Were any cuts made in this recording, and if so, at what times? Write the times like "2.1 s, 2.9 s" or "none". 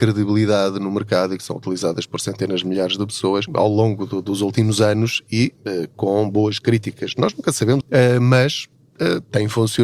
3.5 s, 5.6 s, 7.8 s